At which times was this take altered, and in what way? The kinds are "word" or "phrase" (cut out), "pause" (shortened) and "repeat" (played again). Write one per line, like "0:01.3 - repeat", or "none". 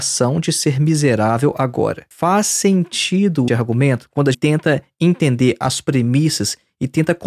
0:03.5 - word
0:04.3 - phrase